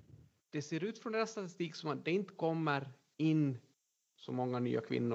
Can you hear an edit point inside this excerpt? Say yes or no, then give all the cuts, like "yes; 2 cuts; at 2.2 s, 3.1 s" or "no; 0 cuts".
no; 0 cuts